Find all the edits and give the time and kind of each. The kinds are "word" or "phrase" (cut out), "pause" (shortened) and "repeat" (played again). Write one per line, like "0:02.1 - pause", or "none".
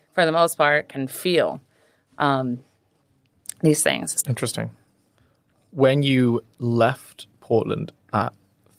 none